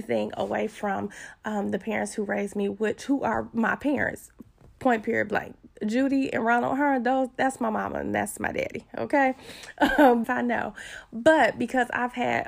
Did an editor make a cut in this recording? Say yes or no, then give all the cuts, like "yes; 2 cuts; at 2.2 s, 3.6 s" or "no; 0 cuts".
yes; 1 cut; at 10.2 s